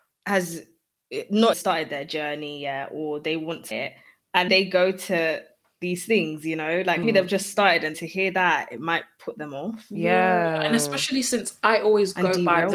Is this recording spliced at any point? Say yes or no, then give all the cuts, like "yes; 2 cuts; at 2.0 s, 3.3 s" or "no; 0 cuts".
yes; 5 cuts; at 1.5 s, 3.7 s, 4.5 s, 7.0 s, 7.9 s